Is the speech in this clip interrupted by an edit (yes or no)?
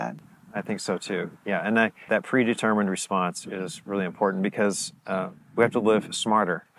yes